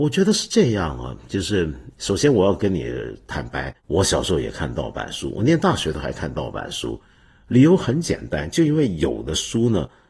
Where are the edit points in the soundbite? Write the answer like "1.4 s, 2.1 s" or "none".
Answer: 3.8 s

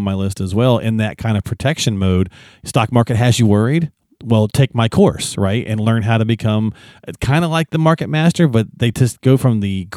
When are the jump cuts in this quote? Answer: none

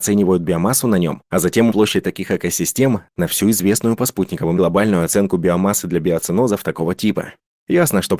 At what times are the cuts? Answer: 1.7 s, 4.6 s

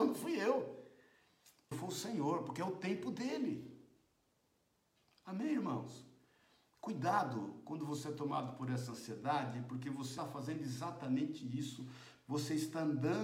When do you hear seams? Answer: 1.7 s, 10.2 s

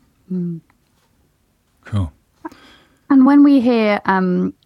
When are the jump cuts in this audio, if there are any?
none

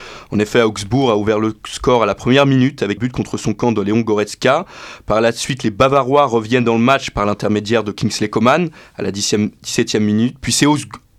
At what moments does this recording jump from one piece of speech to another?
3.0 s

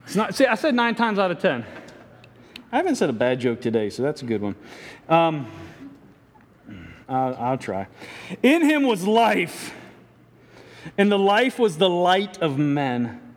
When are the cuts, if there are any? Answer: 7.0 s

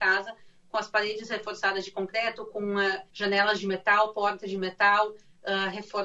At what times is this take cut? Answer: 3.1 s

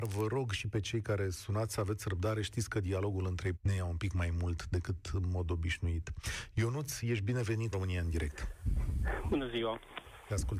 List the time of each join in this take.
3.5 s, 7.7 s

